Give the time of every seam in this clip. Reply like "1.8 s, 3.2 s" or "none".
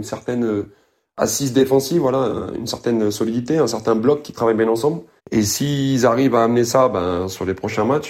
5.2 s